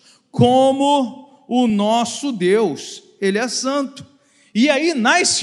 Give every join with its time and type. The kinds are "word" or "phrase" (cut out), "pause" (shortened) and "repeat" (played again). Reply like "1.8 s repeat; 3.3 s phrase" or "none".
none